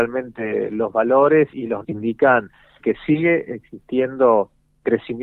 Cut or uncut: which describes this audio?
cut